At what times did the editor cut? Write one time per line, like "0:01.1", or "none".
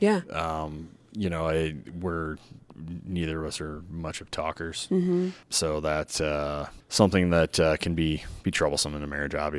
0:05.4